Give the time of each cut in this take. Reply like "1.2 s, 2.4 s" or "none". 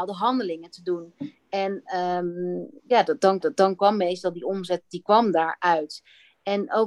2.8 s, 3.4 s